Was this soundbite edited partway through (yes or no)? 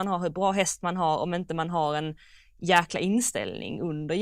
no